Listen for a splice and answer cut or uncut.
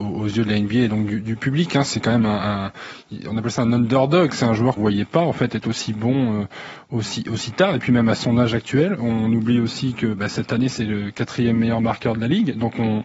cut